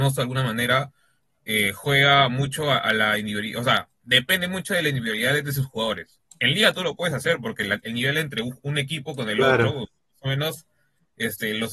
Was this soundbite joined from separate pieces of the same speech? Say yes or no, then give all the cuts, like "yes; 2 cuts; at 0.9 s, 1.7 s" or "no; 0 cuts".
no; 0 cuts